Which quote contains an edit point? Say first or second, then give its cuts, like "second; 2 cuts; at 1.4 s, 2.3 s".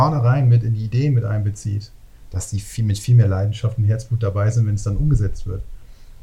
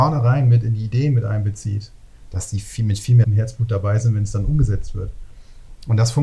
second; 1 cut; at 3.2 s